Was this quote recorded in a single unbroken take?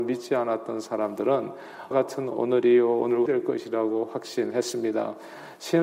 no; 2 cuts; at 1.9 s, 3.3 s

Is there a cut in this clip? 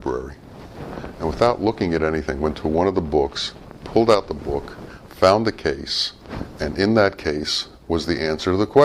yes; 1 cut; at 2.5 s

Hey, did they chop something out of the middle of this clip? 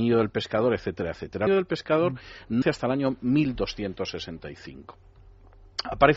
yes; 2 cuts; at 1.5 s, 2.6 s

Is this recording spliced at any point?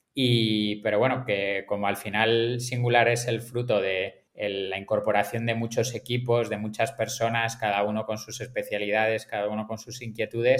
yes; 1 cut; at 4.3 s

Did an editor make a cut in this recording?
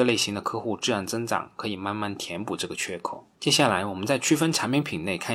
yes; 1 cut; at 3.3 s

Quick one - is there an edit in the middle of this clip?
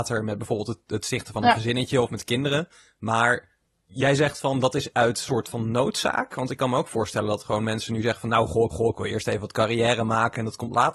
yes; 2 cuts; at 4.9 s, 8.7 s

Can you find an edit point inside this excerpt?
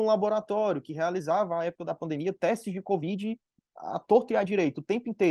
no; 0 cuts

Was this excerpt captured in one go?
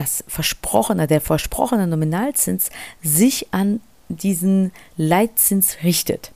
yes; 0 cuts

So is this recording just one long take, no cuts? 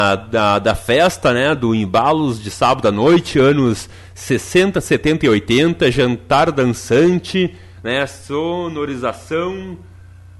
yes; 0 cuts

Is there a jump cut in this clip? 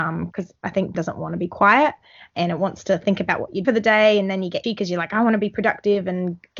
yes; 3 cuts; at 0.9 s, 3.6 s, 4.6 s

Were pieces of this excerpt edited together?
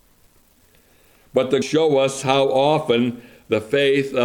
yes; 1 cut; at 1.6 s

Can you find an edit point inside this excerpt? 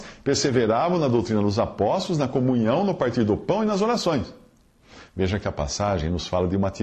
no; 0 cuts

